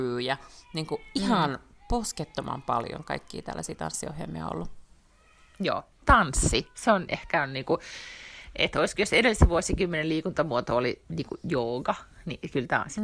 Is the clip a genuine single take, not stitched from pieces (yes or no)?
yes